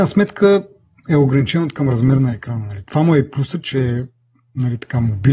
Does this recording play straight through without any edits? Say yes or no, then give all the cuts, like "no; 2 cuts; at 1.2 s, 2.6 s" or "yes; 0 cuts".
yes; 0 cuts